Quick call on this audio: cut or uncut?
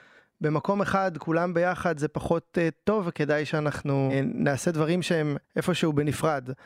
cut